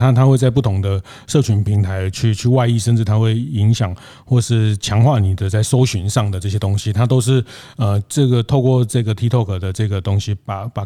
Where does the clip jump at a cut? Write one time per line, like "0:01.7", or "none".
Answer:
none